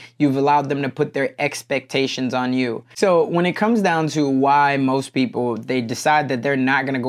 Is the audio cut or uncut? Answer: cut